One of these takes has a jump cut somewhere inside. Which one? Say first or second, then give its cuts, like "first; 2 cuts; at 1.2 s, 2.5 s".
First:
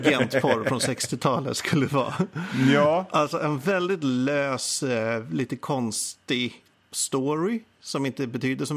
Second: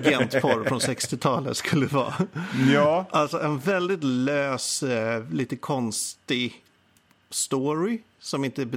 first; 1 cut; at 6.7 s